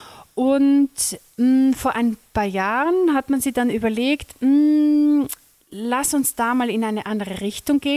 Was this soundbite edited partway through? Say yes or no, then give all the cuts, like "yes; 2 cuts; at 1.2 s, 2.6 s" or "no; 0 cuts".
no; 0 cuts